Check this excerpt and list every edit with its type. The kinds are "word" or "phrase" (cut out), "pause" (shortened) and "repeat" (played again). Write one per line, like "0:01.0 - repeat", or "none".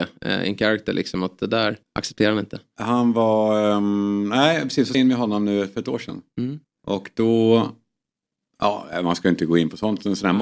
0:01.8 - pause
0:04.9 - phrase
0:06.6 - pause

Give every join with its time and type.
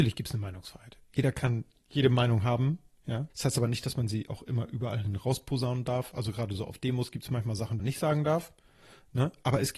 0:03.3 - pause
0:07.8 - word

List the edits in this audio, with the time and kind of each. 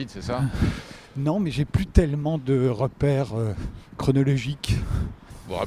0:03.8 - pause

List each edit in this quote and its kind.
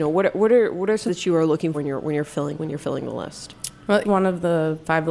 0:01.1 - word
0:01.7 - word
0:02.5 - word
0:04.0 - word

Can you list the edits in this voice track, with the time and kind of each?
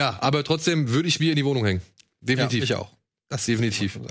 none

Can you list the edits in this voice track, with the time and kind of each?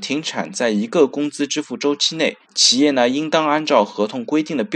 0:02.4 - pause

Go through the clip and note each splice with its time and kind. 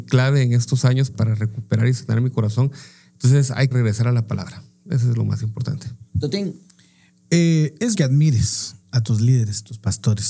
0:01.1 - word
0:03.7 - word
0:06.1 - pause
0:07.9 - word
0:08.8 - pause

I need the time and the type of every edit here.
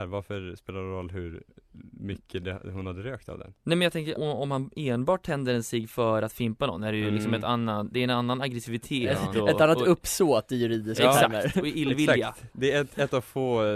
0:04.2 - word

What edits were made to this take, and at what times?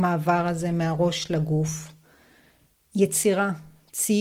none

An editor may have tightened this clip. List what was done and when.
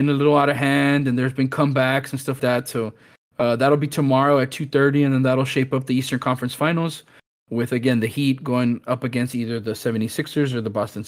0:02.4 - word

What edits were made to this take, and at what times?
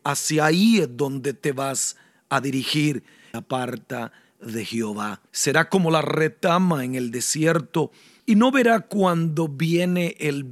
0:03.3 - phrase
0:05.3 - pause

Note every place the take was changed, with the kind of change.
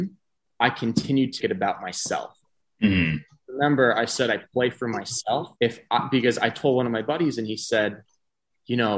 0:01.4 - word
0:05.6 - pause

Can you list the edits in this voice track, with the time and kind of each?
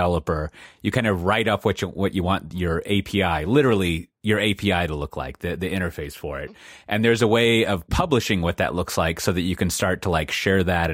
none

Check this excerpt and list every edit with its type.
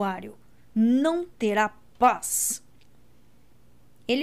none

